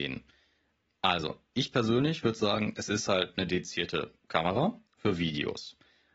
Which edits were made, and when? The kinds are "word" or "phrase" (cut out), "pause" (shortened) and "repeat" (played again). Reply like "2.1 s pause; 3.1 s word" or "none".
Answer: 4.9 s pause

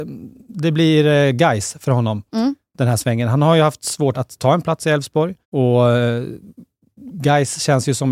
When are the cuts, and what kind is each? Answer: 4.1 s word; 5.4 s pause

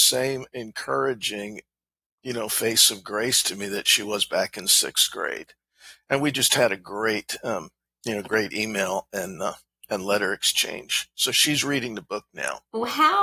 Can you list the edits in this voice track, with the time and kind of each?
none

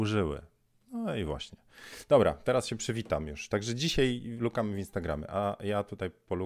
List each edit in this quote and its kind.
none

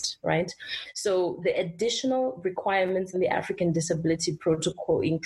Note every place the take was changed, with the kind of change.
1.4 s word; 3.1 s phrase

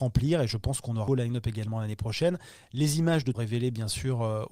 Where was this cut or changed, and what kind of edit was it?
1.1 s phrase; 3.3 s phrase

